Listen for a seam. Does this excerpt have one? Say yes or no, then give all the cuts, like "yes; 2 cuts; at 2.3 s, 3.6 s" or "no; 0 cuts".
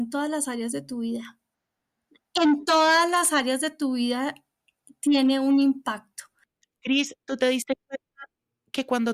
no; 0 cuts